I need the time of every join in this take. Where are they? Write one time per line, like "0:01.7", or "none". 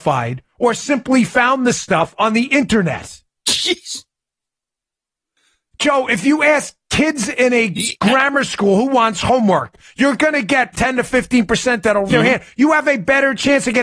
0:10.7
0:12.1